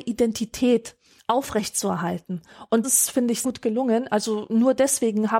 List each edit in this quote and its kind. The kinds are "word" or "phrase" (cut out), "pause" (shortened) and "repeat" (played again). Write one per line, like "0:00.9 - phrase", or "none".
0:01.2 - pause
0:02.8 - word
0:03.4 - word